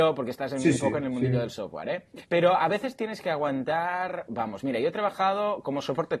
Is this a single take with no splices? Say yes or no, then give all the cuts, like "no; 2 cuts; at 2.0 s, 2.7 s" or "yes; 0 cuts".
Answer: no; 1 cut; at 2.2 s